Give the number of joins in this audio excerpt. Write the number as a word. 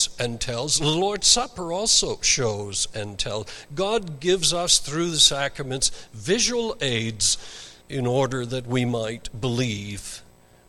one